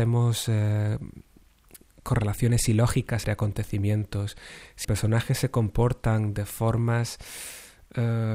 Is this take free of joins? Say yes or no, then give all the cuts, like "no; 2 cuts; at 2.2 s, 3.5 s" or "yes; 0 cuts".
no; 2 cuts; at 3.2 s, 4.8 s